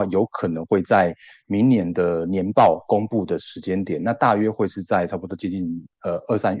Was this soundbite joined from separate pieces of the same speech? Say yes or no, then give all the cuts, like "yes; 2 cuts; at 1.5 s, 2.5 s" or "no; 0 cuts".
no; 0 cuts